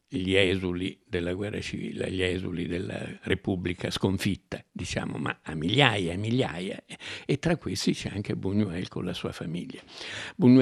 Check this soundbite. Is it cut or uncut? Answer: uncut